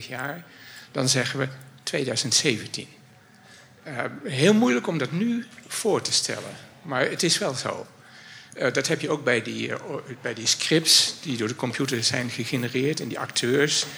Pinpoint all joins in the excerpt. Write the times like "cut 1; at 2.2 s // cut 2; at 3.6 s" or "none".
none